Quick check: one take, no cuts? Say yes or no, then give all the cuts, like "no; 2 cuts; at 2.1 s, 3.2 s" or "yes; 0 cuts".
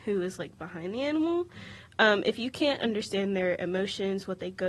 yes; 0 cuts